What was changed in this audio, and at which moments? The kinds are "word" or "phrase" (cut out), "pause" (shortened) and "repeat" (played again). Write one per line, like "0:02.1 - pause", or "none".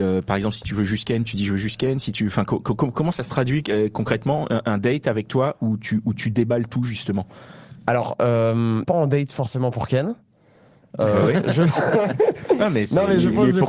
0:08.8 - phrase